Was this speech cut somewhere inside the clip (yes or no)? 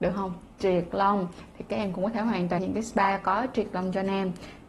yes